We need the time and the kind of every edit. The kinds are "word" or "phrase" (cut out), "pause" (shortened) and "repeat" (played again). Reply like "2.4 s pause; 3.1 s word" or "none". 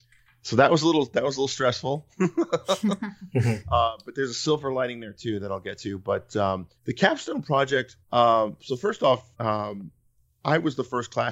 6.8 s pause; 8.0 s pause; 9.3 s pause